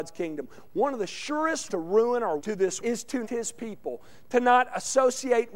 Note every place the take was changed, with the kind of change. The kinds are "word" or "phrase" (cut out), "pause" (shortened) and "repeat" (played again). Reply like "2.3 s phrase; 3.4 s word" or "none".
1.7 s word; 2.4 s phrase; 2.8 s word; 3.2 s word